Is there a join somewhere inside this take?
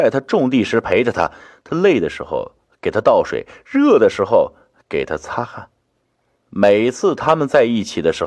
no; 0 cuts

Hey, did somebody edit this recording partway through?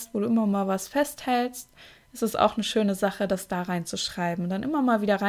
no; 0 cuts

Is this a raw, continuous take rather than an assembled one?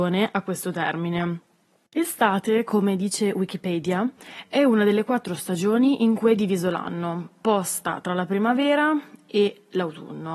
yes; 0 cuts

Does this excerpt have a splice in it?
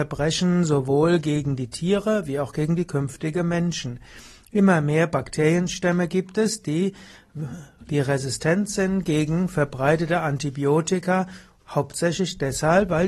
no; 0 cuts

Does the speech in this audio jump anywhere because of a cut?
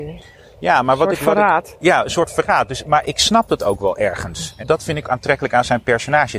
yes; 3 cuts; at 3.0 s, 4.6 s, 5.0 s

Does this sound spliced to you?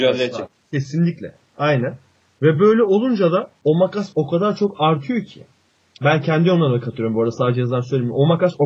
no; 0 cuts

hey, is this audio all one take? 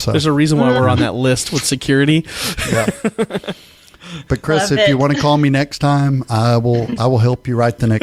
yes; 0 cuts

